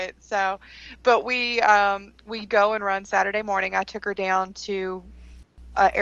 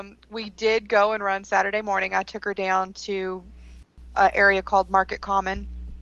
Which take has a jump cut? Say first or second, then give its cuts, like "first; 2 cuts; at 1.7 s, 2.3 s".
first; 1 cut; at 2.5 s